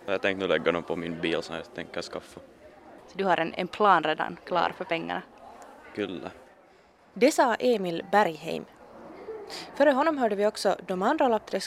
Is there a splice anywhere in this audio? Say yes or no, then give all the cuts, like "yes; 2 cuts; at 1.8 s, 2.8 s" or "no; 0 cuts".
no; 0 cuts